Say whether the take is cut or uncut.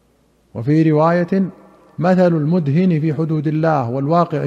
uncut